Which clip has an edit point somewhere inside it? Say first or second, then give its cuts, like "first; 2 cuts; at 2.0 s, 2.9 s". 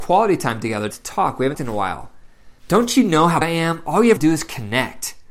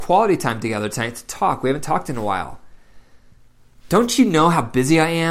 first; 5 cuts; at 0.9 s, 1.5 s, 2.6 s, 3.4 s, 4.2 s